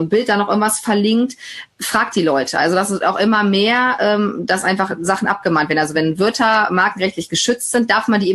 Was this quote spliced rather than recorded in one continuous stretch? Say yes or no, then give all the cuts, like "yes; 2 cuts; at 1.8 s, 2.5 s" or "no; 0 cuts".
no; 0 cuts